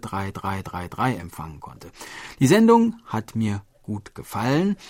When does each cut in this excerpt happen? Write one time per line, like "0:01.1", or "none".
none